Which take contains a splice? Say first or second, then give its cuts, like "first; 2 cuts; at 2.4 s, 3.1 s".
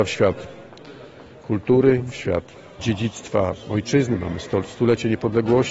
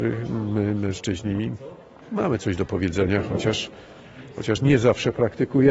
first; 1 cut; at 2.8 s